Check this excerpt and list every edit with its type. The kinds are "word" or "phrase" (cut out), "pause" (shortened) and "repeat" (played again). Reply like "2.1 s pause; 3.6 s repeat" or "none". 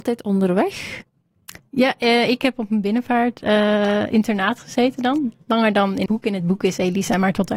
1.6 s pause; 6.1 s word